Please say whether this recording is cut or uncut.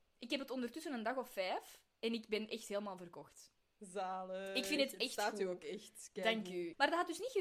uncut